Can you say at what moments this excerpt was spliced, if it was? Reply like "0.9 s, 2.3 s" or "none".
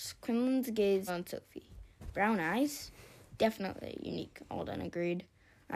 1.1 s